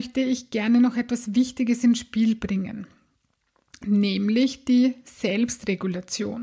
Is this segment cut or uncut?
uncut